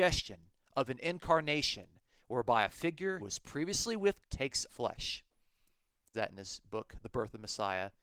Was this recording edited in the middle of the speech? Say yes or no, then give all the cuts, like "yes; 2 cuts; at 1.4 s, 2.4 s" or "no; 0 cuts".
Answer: yes; 4 cuts; at 3.2 s, 4.2 s, 4.7 s, 6.1 s